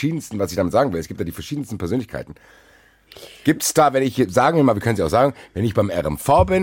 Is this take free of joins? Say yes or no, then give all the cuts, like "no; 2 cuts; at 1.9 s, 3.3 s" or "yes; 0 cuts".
yes; 0 cuts